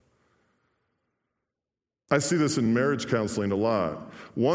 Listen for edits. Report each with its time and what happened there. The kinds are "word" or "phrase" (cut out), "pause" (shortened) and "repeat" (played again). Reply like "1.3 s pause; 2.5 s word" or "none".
none